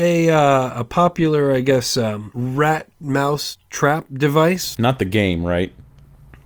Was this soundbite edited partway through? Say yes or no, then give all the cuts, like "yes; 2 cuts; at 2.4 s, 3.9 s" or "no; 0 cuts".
no; 0 cuts